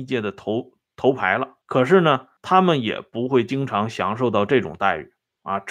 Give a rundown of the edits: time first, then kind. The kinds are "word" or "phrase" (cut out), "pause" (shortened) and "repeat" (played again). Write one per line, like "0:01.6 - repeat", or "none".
0:01.6 - pause
0:02.4 - pause